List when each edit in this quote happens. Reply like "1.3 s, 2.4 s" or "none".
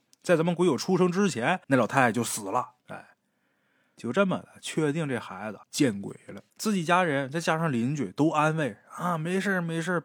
1.6 s, 2.8 s, 5.6 s, 6.5 s